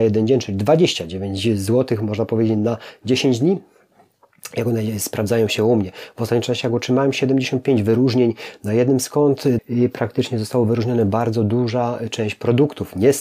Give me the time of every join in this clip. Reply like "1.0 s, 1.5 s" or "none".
9.6 s